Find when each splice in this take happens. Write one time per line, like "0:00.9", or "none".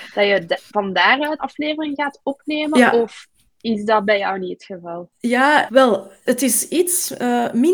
0:01.4
0:05.7
0:06.3